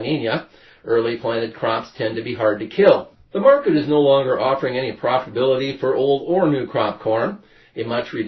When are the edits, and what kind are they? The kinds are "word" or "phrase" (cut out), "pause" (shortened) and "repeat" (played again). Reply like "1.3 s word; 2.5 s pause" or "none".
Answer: none